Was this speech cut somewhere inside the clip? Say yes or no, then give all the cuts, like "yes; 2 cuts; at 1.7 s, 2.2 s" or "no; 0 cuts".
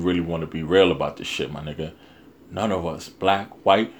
no; 0 cuts